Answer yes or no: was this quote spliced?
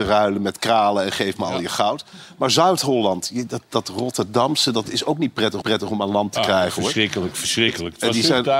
yes